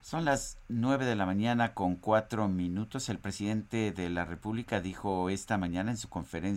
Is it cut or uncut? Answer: uncut